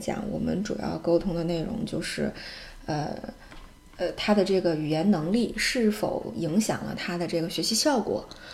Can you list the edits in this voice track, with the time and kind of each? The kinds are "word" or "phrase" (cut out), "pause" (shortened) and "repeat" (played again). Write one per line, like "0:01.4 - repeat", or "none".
none